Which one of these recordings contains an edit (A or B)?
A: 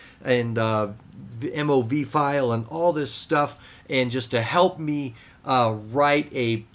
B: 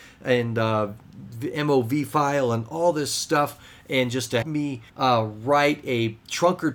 B